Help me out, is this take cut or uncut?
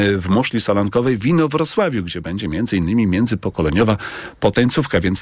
uncut